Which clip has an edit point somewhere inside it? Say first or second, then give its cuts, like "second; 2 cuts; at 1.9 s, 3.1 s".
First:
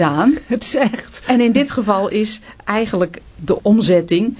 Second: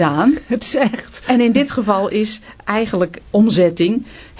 second; 1 cut; at 3.3 s